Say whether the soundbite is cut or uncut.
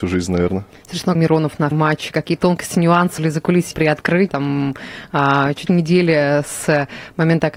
cut